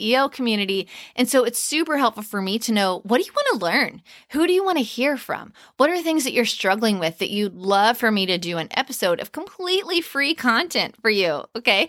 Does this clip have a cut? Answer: no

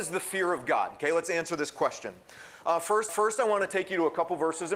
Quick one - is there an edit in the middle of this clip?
yes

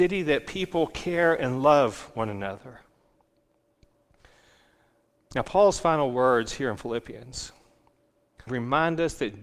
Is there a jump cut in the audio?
yes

